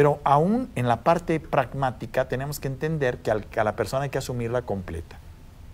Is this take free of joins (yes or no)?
yes